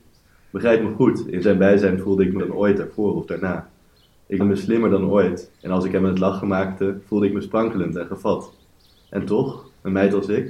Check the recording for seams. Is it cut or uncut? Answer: cut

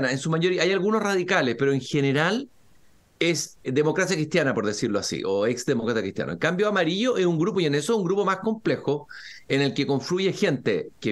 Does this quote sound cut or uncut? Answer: cut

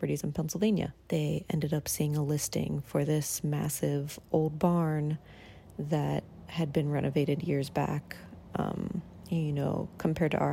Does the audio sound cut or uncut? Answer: cut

